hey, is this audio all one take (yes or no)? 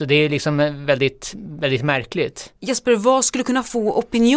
no